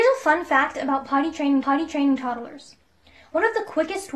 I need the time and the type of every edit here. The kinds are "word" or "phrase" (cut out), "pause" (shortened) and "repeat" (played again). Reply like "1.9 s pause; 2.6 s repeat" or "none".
1.6 s repeat